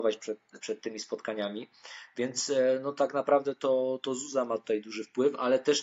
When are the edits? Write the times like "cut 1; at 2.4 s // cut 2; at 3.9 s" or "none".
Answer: none